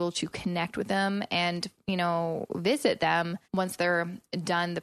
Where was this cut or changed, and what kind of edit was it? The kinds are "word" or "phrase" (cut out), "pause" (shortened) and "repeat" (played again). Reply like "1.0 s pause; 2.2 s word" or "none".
3.4 s pause